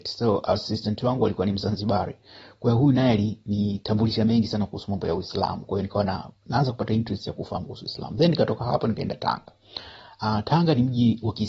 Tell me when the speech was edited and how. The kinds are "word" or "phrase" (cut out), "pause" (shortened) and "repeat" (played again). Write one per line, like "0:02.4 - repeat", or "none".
none

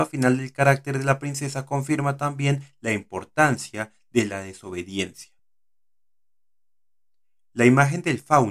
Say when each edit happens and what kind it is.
none

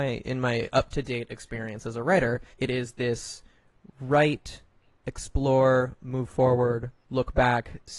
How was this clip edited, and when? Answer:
0:02.5 - pause

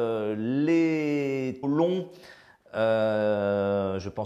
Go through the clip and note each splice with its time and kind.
0:01.6 - word

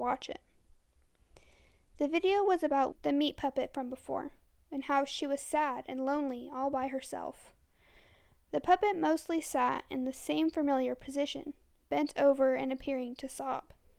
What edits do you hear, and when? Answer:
0:02.9 - word

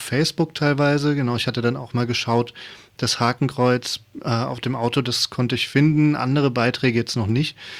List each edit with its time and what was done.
none

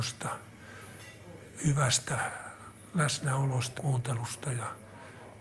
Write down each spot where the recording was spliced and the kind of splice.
0:03.8 - word

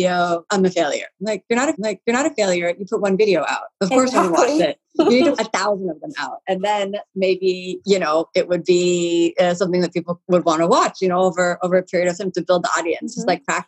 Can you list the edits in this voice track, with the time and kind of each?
0:01.7 - repeat
0:03.7 - pause
0:05.4 - phrase

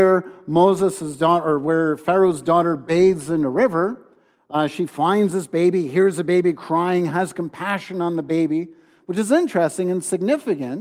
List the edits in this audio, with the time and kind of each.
none

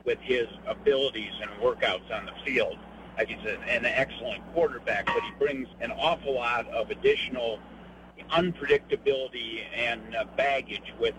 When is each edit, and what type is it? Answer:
0:03.3 - word
0:05.7 - pause

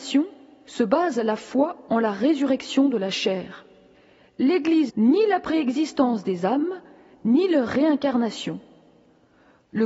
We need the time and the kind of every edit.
0:04.9 - word

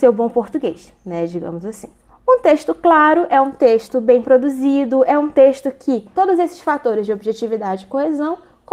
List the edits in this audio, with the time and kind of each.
0:02.1 - pause
0:06.1 - word

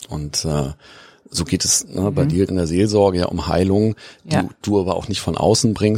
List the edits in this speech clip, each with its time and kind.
0:02.5 - phrase

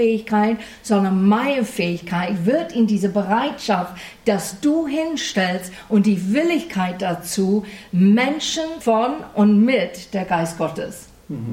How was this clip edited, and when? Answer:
0:08.8 - phrase

